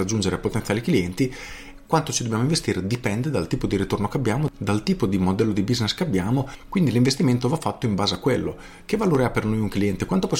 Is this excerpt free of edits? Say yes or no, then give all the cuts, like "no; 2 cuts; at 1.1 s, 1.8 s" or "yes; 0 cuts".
yes; 0 cuts